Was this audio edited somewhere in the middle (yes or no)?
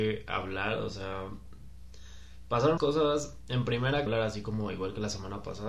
yes